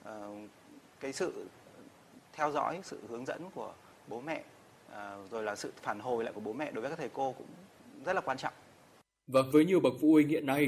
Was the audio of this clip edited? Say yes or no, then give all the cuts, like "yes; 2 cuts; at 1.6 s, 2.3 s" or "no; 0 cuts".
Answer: no; 0 cuts